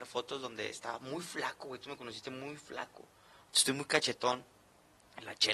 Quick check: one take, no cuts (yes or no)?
yes